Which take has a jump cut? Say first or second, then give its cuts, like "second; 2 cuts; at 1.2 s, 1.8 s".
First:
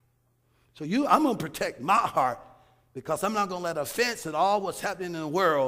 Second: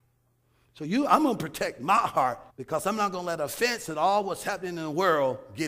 second; 1 cut; at 2.5 s